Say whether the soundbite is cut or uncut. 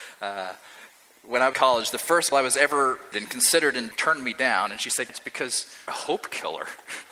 cut